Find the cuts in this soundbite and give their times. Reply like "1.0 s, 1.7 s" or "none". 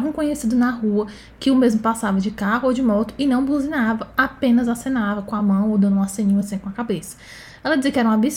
none